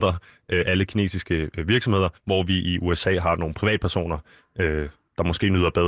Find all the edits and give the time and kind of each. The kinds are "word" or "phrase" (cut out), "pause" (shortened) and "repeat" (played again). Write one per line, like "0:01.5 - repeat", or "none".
0:02.2 - pause